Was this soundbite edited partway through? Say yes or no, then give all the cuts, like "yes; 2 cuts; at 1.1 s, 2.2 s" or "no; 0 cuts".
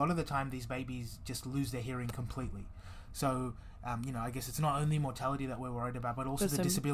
no; 0 cuts